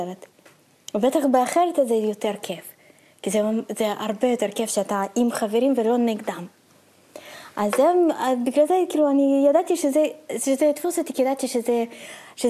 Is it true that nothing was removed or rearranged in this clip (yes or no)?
yes